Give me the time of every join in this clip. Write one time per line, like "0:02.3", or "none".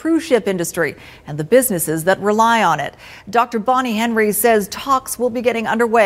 none